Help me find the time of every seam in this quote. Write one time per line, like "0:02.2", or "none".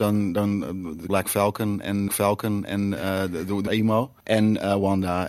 0:01.1
0:02.1
0:03.7
0:04.2

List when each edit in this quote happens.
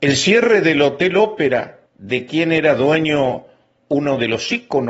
0:01.9

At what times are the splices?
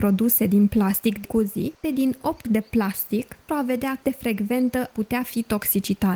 0:01.2
0:01.8
0:02.4
0:03.5
0:04.0
0:04.9

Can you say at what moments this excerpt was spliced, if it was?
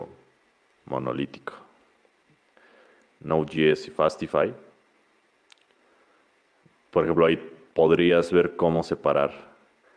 none

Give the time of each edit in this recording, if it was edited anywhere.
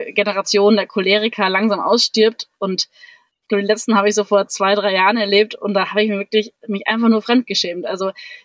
none

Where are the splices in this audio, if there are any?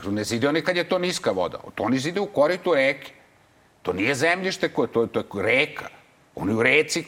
none

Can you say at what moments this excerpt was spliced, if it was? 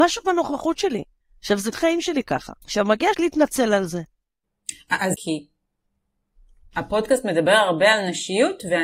0:01.2
0:01.7
0:02.6
0:03.1
0:05.1

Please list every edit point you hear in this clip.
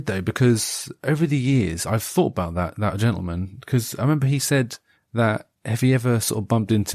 0:04.9

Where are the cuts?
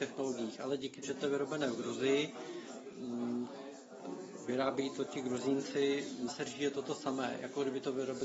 0:01.0
0:06.3

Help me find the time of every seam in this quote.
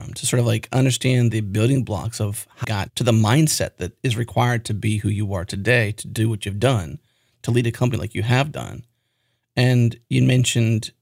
0:02.6

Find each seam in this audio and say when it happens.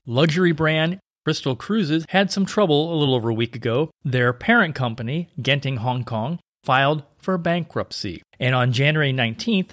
none

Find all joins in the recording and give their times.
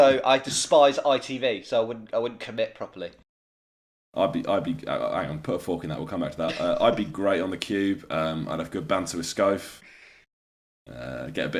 none

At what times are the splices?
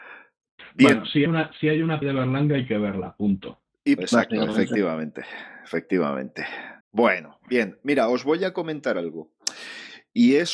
0:01.3
0:02.0
0:04.0
0:06.8

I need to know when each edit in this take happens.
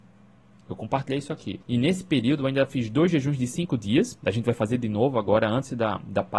0:01.6

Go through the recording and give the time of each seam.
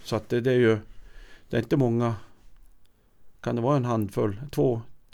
0:03.3

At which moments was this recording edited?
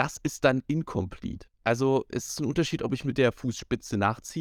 0:01.5

